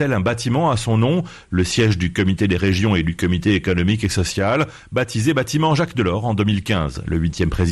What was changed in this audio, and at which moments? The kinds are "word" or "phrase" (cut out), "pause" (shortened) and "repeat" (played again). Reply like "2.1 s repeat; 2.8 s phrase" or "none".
none